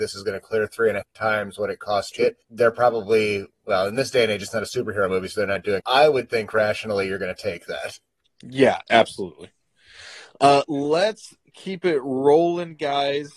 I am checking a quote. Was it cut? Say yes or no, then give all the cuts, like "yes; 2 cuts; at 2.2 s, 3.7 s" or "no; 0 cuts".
yes; 5 cuts; at 1.0 s, 2.1 s, 2.4 s, 5.8 s, 8.2 s